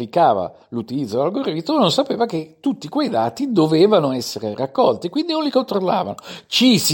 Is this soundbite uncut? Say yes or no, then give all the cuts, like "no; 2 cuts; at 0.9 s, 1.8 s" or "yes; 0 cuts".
yes; 0 cuts